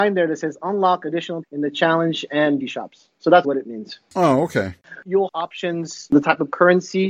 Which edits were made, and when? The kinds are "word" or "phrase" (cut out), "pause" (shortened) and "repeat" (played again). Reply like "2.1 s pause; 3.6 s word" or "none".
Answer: 1.4 s word; 2.6 s word; 3.4 s word; 5.3 s word; 6.1 s word